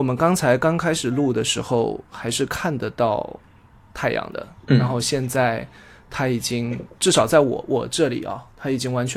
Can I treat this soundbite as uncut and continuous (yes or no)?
yes